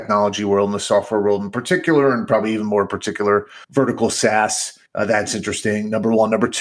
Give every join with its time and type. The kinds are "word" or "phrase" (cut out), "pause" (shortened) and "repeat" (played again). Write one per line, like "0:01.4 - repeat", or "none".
0:03.6 - pause
0:04.9 - pause